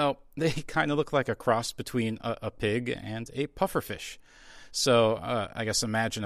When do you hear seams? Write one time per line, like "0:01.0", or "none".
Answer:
none